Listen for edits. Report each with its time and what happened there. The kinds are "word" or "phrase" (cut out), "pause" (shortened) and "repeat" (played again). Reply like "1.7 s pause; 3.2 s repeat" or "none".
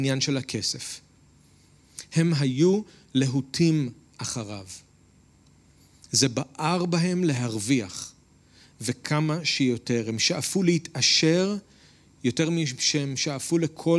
none